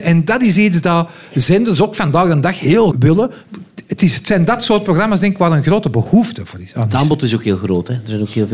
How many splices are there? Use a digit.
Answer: 1